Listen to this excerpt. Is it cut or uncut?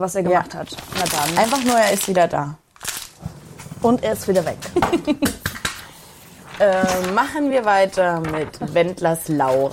uncut